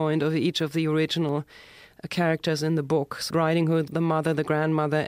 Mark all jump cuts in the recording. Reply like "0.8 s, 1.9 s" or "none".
3.3 s, 3.9 s